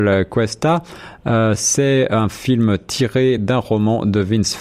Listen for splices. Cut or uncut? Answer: uncut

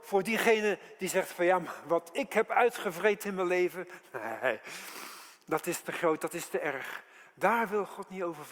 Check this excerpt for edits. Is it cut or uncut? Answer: uncut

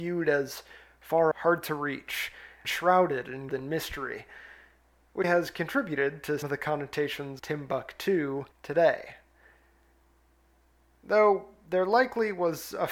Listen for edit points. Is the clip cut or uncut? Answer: cut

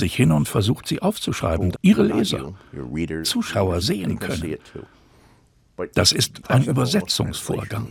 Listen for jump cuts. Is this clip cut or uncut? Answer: cut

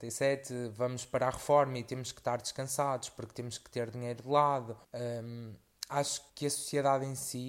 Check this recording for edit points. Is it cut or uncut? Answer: cut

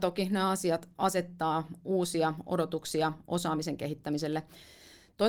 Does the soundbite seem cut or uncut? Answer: uncut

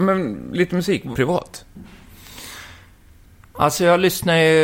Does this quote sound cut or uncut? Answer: cut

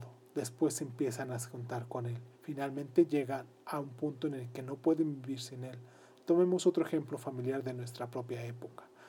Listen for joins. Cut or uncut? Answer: cut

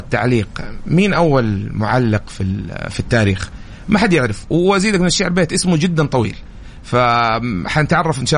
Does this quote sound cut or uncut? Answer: uncut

